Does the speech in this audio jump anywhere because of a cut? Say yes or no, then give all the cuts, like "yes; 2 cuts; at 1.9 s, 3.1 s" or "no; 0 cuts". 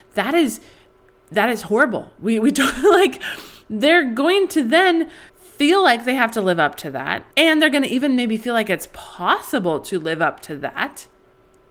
yes; 2 cuts; at 5.3 s, 7.3 s